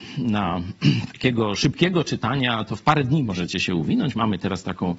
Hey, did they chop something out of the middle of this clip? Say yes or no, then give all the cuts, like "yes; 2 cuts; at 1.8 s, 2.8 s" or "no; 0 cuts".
no; 0 cuts